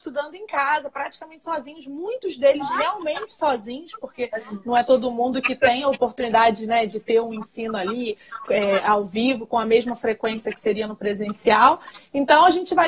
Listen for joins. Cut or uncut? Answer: uncut